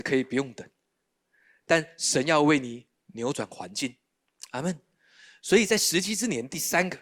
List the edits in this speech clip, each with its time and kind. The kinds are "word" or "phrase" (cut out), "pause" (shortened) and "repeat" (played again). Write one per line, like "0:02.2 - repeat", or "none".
none